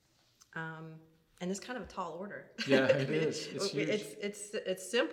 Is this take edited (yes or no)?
no